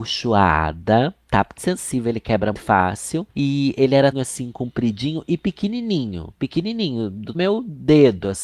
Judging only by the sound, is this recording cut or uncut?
cut